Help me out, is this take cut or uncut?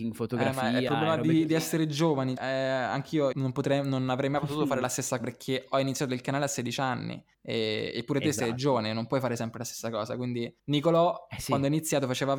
cut